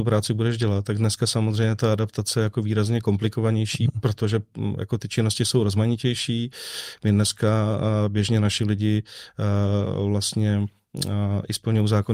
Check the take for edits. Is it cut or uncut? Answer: uncut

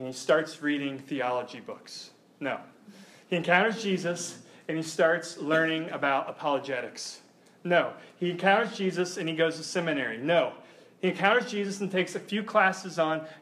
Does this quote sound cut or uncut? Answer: uncut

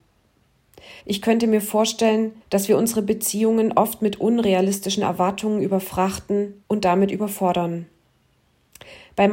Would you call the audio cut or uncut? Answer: cut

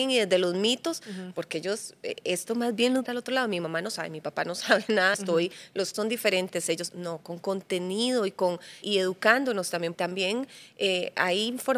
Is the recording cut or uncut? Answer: cut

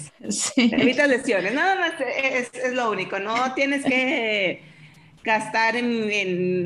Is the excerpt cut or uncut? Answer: uncut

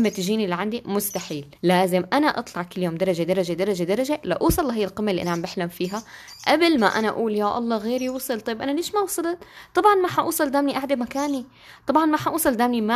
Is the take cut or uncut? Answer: cut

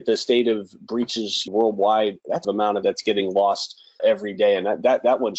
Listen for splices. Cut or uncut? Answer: cut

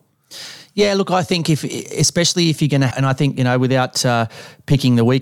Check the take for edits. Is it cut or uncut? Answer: cut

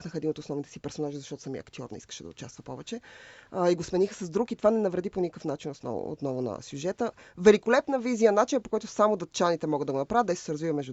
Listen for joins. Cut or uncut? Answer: uncut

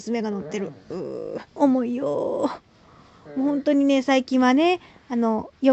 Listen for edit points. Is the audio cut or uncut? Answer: cut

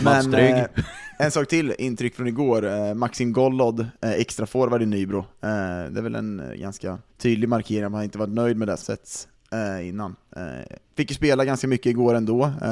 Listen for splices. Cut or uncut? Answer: cut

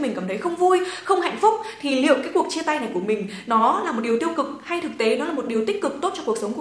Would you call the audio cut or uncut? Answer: uncut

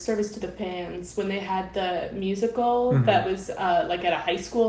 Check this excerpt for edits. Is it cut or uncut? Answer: uncut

